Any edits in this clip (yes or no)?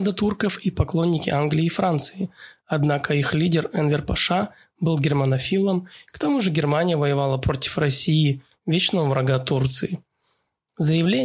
no